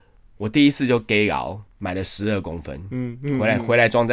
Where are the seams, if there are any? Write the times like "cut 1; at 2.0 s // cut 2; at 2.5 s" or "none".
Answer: cut 1; at 1.7 s